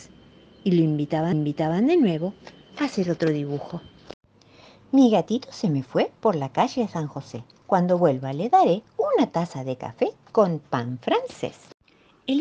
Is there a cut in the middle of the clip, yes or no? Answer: yes